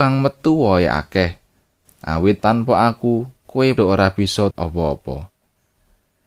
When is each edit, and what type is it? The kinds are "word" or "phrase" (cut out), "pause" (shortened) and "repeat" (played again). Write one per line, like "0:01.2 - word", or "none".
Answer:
0:02.4 - word
0:03.8 - word
0:04.5 - word